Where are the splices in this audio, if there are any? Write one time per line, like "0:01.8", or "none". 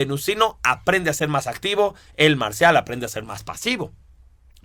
none